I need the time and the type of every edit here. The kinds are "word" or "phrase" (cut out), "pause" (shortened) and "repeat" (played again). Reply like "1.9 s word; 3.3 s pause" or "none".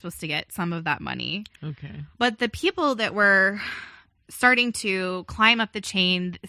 2.1 s pause